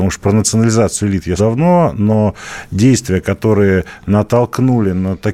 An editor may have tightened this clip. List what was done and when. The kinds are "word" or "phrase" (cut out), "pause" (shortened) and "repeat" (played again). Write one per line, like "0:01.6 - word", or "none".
0:01.4 - word